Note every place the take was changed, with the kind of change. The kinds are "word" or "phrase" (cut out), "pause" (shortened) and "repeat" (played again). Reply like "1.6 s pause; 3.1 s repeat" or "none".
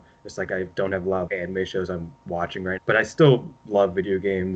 1.3 s word; 2.8 s word; 3.6 s word